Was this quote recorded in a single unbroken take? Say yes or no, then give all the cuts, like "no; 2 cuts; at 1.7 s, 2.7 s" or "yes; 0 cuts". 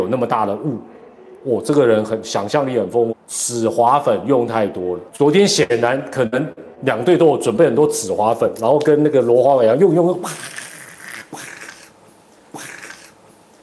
no; 4 cuts; at 3.1 s, 5.1 s, 6.8 s, 12.5 s